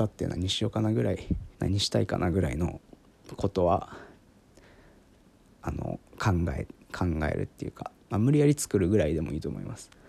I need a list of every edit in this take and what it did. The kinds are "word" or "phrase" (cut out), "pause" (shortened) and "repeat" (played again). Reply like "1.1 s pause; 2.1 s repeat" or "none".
1.5 s pause